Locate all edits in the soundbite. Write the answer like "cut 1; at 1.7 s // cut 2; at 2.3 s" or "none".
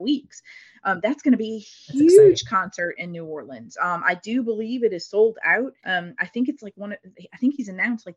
cut 1; at 5.8 s